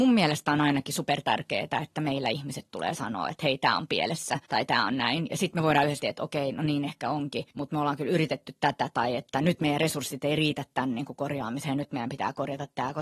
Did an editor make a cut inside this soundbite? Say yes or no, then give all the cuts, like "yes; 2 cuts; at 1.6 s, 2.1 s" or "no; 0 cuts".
yes; 3 cuts; at 4.5 s, 6.0 s, 7.5 s